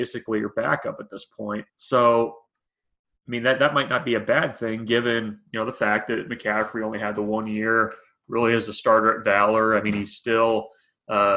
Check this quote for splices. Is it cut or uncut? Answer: cut